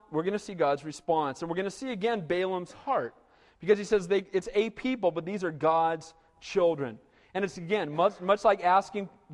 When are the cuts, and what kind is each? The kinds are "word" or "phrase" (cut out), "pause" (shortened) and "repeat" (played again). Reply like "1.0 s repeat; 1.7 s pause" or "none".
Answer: none